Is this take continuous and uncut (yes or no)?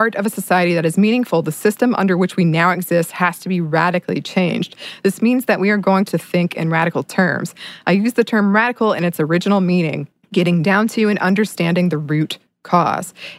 no